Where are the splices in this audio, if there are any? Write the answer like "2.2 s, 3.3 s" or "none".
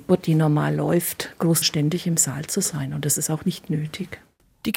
1.6 s

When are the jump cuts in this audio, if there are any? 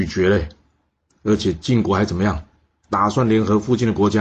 none

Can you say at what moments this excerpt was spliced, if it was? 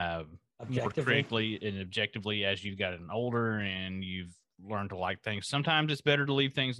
none

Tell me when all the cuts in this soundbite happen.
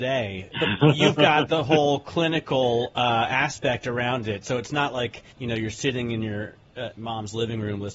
5.3 s

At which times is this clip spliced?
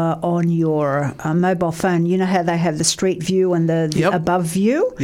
none

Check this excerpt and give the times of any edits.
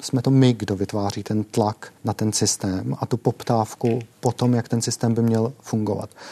2.0 s, 4.1 s

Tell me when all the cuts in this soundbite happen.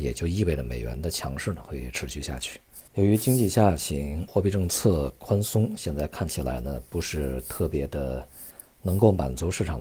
2.9 s, 4.3 s

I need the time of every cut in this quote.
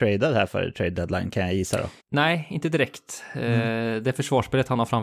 2.0 s

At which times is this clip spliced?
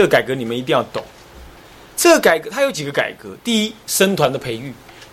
none

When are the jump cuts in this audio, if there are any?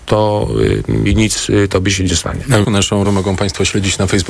1.1 s, 2.6 s, 3.0 s

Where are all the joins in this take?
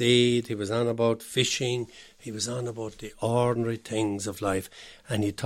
none

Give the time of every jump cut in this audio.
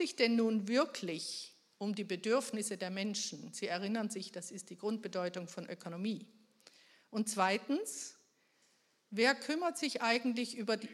none

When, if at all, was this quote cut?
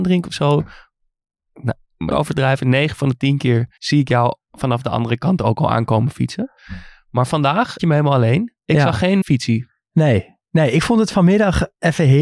2.1 s, 3.8 s, 7.8 s, 8.6 s, 9.2 s, 10.4 s

